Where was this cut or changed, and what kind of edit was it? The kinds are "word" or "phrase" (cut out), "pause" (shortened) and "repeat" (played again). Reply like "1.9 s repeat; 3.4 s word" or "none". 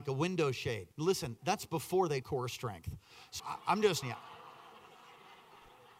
0.9 s pause; 2.2 s phrase; 3.4 s word; 4.0 s word

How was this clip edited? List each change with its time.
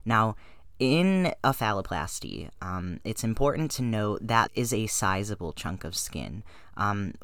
4.5 s word

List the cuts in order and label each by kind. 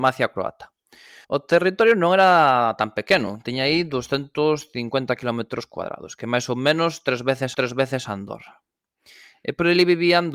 1.2 s pause; 7.5 s repeat

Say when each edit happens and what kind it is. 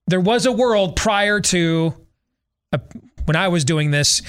3.2 s word

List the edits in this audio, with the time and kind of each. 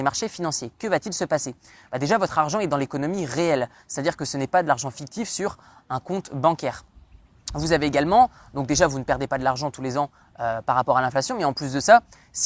none

